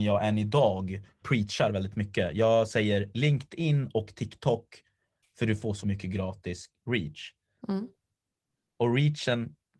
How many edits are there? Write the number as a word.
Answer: two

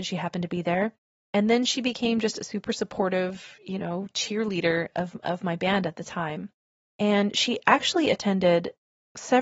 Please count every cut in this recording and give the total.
zero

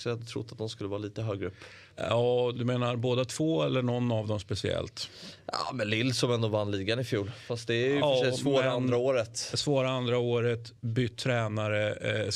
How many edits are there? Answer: two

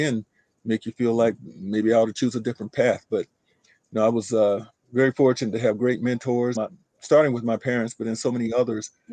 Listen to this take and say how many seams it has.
one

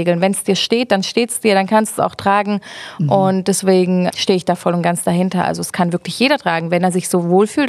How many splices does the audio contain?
one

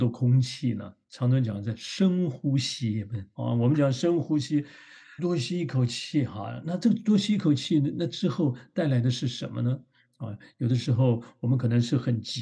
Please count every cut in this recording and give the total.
two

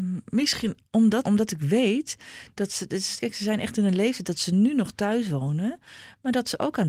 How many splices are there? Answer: two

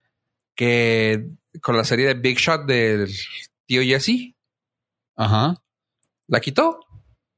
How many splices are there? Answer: zero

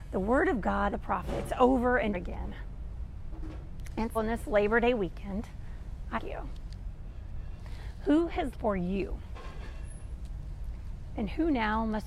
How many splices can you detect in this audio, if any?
five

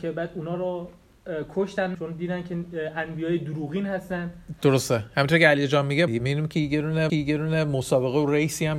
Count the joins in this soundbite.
three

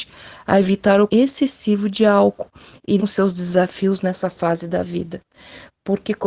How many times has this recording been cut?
two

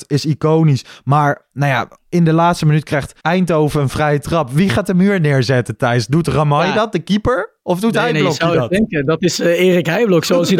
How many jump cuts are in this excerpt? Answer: two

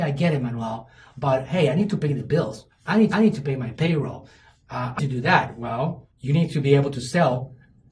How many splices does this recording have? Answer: three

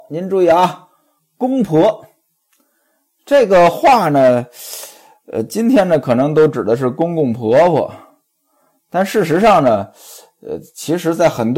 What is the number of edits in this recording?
zero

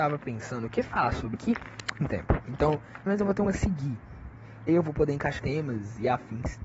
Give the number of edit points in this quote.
six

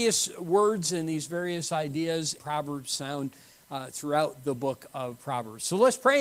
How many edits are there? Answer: one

